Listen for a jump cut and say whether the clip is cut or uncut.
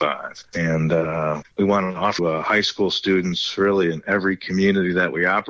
cut